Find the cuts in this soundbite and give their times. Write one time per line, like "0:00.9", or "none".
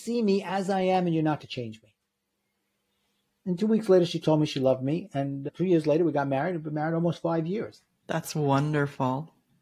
0:01.4